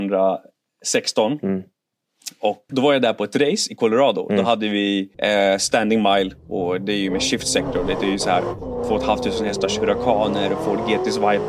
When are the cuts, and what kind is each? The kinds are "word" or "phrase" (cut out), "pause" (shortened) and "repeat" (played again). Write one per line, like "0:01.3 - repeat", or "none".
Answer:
0:02.7 - word
0:05.1 - pause